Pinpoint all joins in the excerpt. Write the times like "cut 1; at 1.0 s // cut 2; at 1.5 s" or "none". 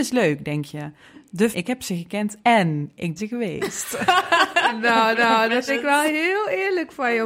cut 1; at 1.5 s // cut 2; at 2.4 s // cut 3; at 3.2 s // cut 4; at 5.1 s // cut 5; at 5.7 s